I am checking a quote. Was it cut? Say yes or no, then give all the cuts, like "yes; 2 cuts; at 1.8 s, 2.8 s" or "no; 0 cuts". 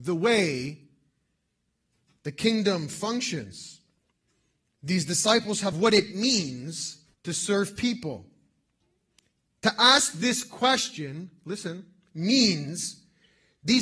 yes; 2 cuts; at 5.7 s, 7.1 s